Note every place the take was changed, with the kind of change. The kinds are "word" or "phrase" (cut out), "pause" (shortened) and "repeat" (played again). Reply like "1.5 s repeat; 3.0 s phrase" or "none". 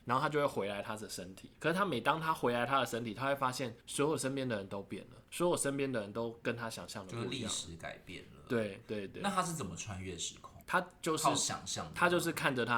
1.5 s pause; 3.8 s pause; 5.3 s pause; 10.6 s pause